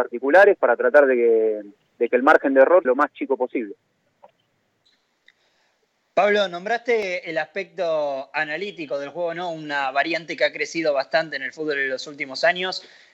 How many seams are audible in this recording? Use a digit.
1